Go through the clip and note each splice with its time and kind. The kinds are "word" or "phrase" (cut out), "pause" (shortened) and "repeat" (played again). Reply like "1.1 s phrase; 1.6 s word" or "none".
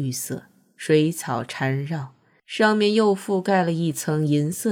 none